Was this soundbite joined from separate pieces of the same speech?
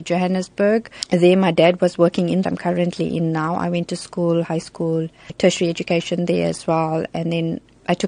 yes; 1 cut; at 2.4 s

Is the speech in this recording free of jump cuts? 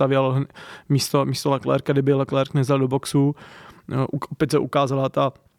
yes; 0 cuts

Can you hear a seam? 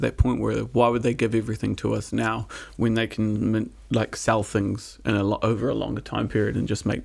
no; 0 cuts

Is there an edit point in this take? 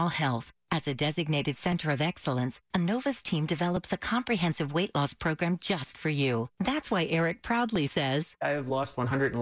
no; 0 cuts

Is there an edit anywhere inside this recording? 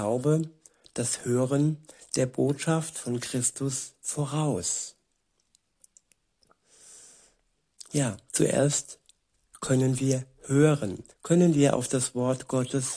yes; 1 cut; at 11.1 s

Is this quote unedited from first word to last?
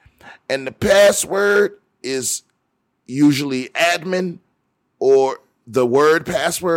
yes; 0 cuts

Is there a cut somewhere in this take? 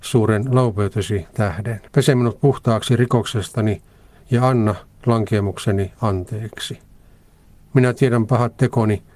yes; 1 cut; at 1.9 s

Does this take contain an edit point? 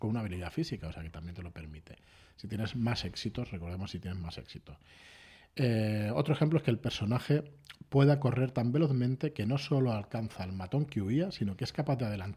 no; 0 cuts

